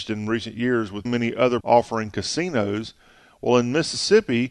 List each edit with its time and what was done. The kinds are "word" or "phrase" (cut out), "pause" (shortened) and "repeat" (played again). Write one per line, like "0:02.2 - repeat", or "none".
0:01.1 - word
0:01.6 - word